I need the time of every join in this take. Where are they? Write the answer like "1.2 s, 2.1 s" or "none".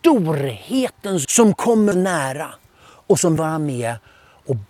1.2 s, 1.9 s, 3.4 s